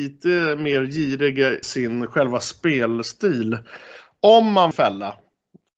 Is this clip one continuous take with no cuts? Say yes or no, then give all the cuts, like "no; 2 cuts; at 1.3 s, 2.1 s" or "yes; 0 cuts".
no; 2 cuts; at 1.6 s, 4.7 s